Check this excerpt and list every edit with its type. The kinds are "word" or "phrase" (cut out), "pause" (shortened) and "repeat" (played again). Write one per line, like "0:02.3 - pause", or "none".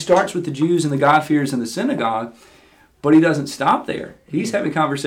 none